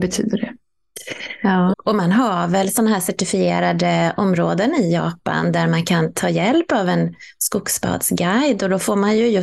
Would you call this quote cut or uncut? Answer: cut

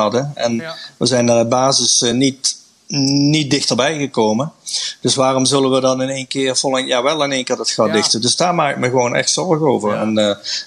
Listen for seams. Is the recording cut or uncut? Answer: uncut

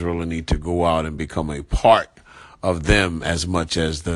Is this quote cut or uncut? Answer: uncut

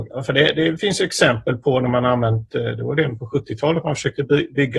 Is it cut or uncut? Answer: uncut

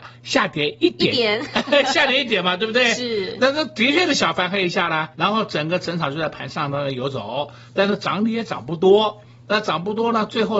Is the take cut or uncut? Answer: cut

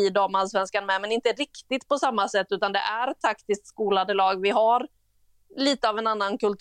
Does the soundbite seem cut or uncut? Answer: uncut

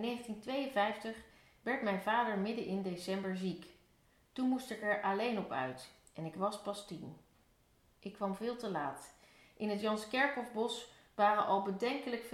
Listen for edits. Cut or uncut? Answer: uncut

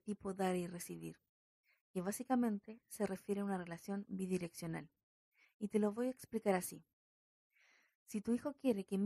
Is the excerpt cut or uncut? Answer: uncut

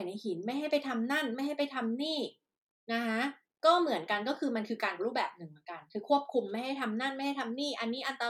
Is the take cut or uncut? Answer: cut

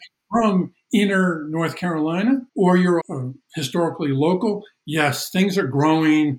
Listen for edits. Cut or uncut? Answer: cut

